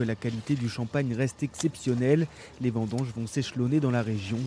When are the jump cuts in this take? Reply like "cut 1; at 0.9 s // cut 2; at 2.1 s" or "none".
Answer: none